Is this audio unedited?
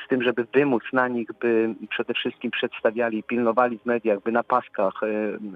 yes; 0 cuts

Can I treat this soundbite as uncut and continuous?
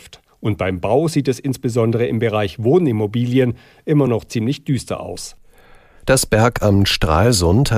yes; 0 cuts

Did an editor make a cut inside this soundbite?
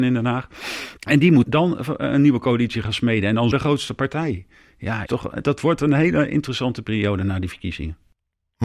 yes; 4 cuts; at 1.0 s, 1.4 s, 3.5 s, 5.1 s

